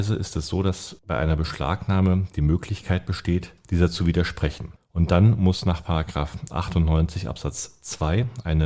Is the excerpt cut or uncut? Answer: uncut